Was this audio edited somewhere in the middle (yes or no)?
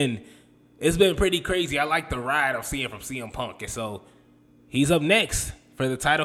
no